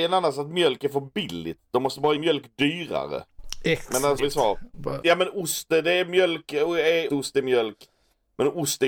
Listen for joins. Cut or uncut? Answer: cut